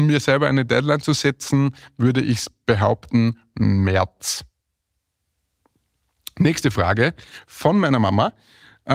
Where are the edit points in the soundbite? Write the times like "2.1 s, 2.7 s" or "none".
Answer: none